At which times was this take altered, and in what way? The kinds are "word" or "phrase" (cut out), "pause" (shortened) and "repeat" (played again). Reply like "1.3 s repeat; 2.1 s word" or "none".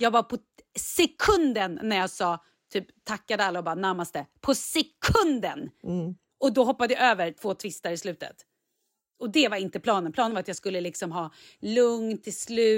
none